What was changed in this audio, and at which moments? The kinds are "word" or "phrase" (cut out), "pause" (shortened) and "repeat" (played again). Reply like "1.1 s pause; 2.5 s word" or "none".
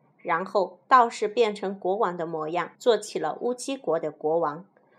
2.8 s pause